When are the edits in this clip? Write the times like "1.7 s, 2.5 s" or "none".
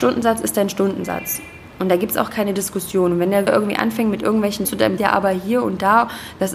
3.5 s, 4.6 s, 5.0 s